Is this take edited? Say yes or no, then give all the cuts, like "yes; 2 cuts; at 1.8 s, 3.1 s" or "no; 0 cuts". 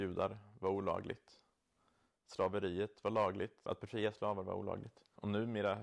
no; 0 cuts